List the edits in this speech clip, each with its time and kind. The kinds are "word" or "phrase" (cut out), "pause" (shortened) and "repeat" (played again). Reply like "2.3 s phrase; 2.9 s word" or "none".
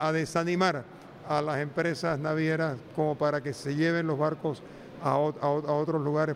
none